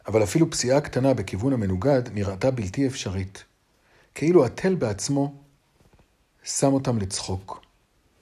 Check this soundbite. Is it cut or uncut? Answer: uncut